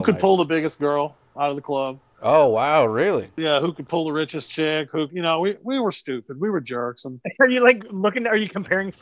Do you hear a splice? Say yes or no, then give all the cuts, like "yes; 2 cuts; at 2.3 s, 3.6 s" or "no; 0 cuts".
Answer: no; 0 cuts